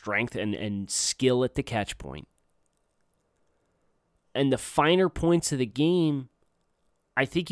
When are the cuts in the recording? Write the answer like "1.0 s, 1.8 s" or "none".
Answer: none